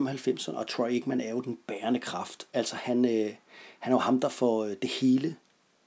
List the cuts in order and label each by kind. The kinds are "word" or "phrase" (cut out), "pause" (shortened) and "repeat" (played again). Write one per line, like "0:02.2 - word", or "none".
none